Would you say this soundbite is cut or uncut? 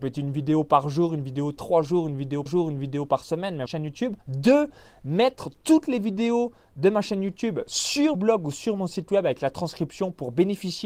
cut